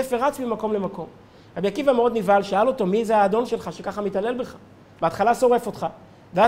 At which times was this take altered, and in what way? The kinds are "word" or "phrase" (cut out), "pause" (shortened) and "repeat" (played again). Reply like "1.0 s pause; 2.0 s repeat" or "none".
none